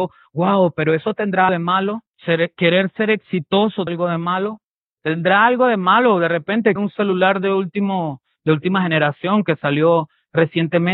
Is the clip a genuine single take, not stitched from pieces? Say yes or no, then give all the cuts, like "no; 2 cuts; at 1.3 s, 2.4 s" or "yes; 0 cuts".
no; 5 cuts; at 1.5 s, 2.1 s, 3.9 s, 4.9 s, 6.8 s